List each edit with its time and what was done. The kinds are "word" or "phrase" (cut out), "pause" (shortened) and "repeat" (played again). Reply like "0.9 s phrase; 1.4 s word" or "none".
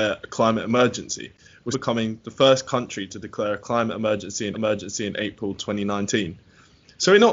1.7 s word; 4.5 s repeat